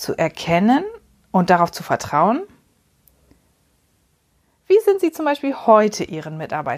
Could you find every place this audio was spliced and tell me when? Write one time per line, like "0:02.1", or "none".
none